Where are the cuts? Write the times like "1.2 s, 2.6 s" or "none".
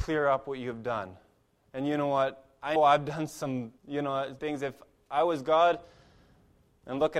2.8 s, 3.8 s, 4.4 s